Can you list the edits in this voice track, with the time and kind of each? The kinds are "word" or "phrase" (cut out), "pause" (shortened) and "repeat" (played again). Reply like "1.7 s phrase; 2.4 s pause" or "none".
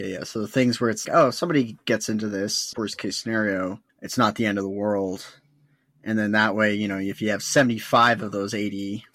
1.0 s word; 2.7 s word; 3.9 s pause